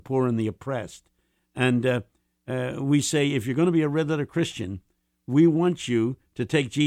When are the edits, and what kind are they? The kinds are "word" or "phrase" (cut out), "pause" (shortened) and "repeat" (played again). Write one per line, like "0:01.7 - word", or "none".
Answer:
none

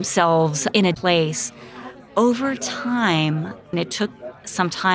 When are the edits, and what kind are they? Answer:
0:00.9 - word
0:03.7 - word

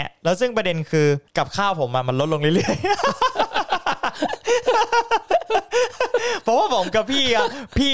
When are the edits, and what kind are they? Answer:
0:01.3 - pause

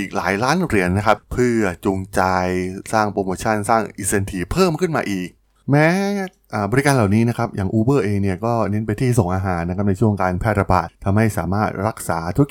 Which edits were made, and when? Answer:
none

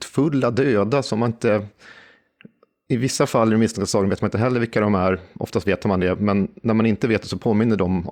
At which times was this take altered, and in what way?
none

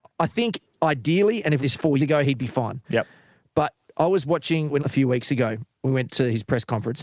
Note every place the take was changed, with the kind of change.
0:01.6 - phrase
0:02.0 - word
0:02.8 - pause
0:04.8 - phrase

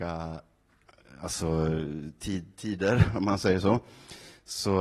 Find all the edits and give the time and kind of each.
none

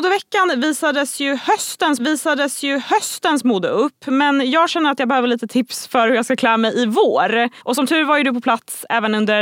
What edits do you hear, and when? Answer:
0:02.0 - repeat
0:07.6 - pause

